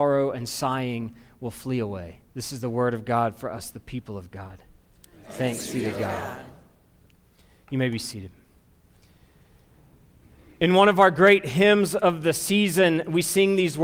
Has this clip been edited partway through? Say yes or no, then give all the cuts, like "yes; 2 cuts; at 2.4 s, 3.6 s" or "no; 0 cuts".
yes; 1 cut; at 2.3 s